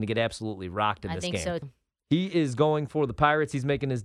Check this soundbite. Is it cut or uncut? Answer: cut